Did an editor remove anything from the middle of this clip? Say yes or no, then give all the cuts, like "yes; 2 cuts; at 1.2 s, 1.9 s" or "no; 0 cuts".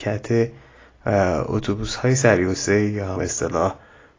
yes; 1 cut; at 3.2 s